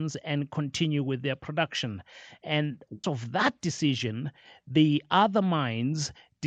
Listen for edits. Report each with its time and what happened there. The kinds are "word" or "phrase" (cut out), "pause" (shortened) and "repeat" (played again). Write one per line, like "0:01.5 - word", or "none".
0:03.0 - word

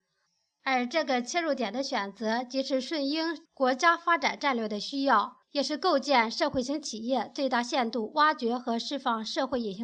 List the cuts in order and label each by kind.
0:03.5 - pause
0:05.4 - pause

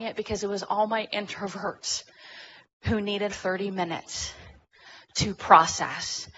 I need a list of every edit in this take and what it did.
0:03.3 - word

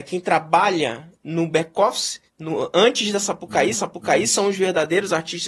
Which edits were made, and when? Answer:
0:01.1 - word
0:02.3 - pause
0:03.7 - repeat

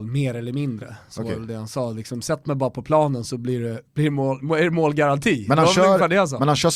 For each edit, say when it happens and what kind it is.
none

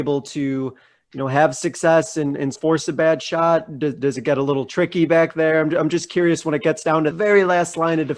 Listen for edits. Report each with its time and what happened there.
0:02.5 - word
0:07.1 - word

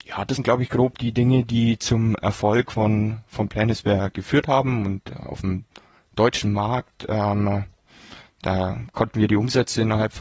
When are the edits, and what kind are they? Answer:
none

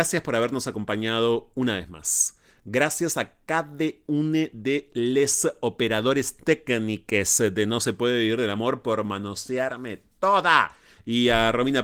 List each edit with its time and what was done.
none

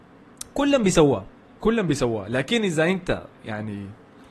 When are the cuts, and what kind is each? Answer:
none

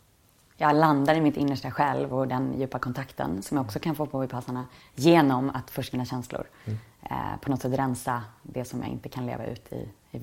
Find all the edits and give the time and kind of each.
0:04.8 - pause
0:05.9 - phrase

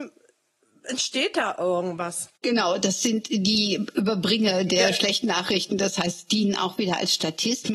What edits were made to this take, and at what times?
0:02.4 - pause

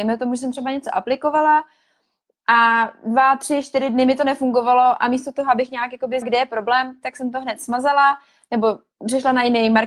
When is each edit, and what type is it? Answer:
0:06.2 - word

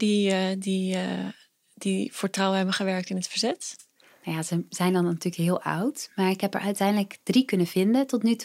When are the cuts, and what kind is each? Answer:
none

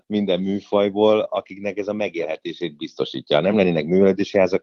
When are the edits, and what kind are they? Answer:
none

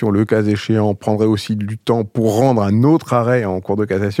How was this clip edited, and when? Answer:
none

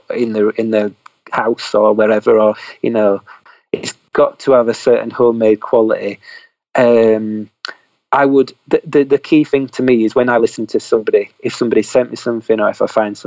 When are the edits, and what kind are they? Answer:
none

